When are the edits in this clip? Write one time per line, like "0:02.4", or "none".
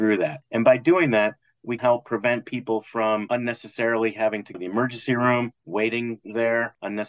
0:01.8
0:04.5
0:05.6